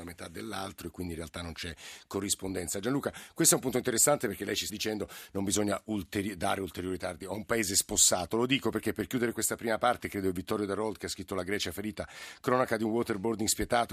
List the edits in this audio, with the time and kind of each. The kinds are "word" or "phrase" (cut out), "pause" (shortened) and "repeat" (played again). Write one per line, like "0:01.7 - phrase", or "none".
0:04.7 - word